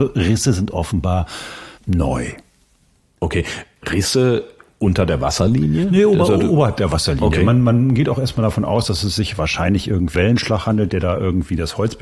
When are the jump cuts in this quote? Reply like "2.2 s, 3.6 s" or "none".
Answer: 1.8 s, 10.1 s